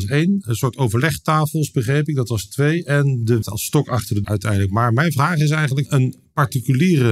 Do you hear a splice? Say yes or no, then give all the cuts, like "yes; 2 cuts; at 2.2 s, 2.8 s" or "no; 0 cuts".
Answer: yes; 2 cuts; at 3.4 s, 4.2 s